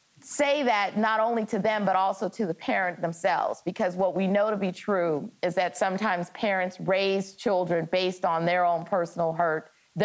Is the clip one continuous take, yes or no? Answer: yes